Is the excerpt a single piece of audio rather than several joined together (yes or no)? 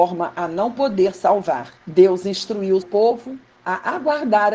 no